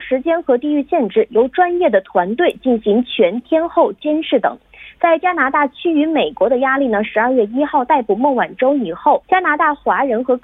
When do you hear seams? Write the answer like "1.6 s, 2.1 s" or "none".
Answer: 9.2 s